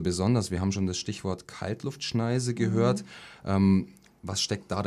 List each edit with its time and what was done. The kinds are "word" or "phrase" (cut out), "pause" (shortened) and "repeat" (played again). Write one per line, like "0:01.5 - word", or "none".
none